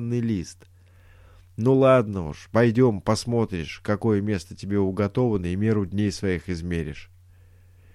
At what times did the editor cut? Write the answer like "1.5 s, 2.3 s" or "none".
none